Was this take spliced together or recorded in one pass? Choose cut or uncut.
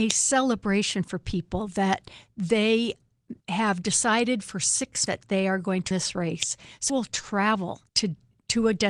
cut